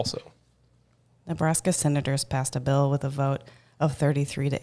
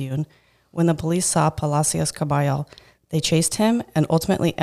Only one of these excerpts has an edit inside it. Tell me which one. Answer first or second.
first